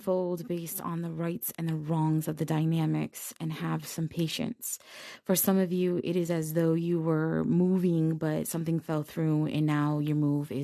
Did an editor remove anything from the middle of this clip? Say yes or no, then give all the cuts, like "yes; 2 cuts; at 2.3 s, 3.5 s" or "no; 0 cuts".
no; 0 cuts